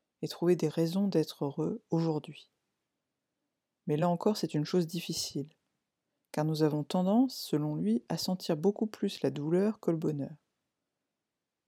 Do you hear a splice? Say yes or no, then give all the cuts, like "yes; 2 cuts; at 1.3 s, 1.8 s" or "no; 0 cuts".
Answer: no; 0 cuts